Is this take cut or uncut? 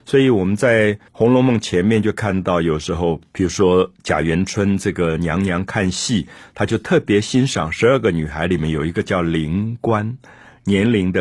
cut